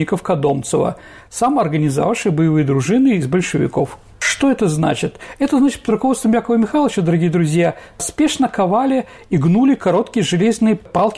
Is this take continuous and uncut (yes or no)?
yes